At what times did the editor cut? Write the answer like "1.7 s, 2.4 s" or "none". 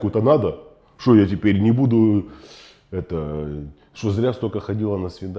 none